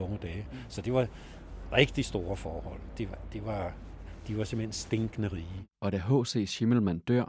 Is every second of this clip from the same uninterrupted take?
no; 1 cut; at 5.7 s

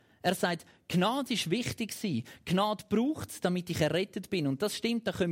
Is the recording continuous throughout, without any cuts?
yes; 0 cuts

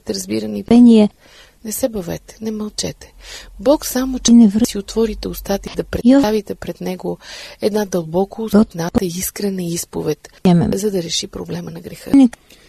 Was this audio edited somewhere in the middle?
yes; 1 cut; at 10.4 s

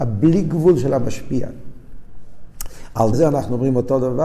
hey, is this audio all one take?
no; 1 cut; at 3.1 s

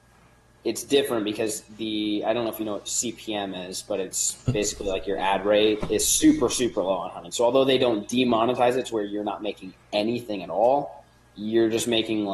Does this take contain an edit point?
no; 0 cuts

